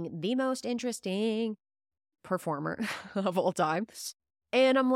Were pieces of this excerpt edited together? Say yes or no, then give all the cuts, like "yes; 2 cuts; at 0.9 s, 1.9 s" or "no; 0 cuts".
no; 0 cuts